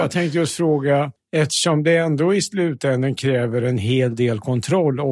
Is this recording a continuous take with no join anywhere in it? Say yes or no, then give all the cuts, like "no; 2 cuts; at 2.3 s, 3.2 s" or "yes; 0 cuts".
no; 1 cut; at 1.2 s